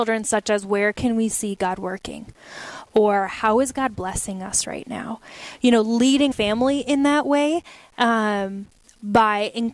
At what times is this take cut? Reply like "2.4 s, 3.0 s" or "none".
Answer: 6.3 s